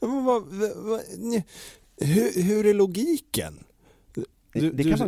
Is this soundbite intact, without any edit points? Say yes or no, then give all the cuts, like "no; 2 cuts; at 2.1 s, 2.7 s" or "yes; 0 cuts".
yes; 0 cuts